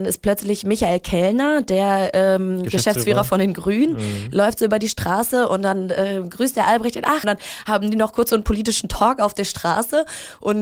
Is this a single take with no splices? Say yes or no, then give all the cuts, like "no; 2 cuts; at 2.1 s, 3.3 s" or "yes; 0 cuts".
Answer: no; 1 cut; at 7.2 s